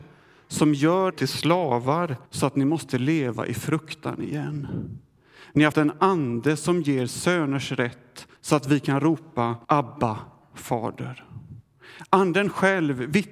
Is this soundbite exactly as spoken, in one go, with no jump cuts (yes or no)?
no